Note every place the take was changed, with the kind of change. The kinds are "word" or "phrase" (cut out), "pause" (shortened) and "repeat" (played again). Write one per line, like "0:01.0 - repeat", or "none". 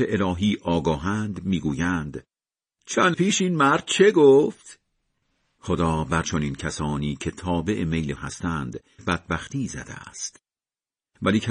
0:03.1 - word
0:06.2 - word
0:08.2 - word
0:09.0 - word